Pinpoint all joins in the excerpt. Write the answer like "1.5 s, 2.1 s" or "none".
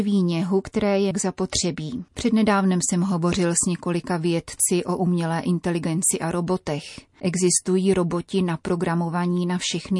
1.1 s, 2.1 s